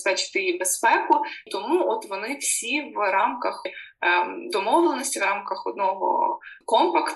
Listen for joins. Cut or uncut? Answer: cut